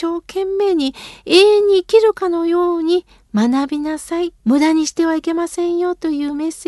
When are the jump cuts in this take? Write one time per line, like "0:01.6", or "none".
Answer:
0:04.4